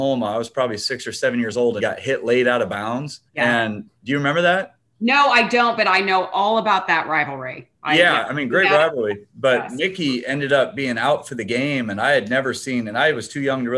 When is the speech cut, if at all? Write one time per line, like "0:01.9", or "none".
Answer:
0:01.8
0:03.3